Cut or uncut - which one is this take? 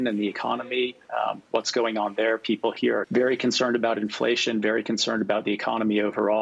cut